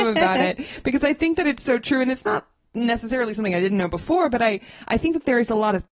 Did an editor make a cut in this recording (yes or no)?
no